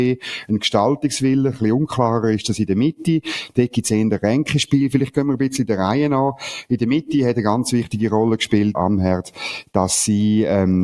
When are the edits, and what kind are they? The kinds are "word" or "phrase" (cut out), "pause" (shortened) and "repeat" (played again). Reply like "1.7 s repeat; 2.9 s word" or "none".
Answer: 8.7 s phrase